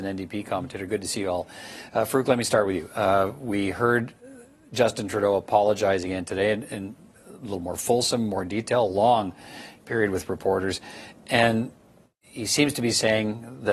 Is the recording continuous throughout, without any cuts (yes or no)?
yes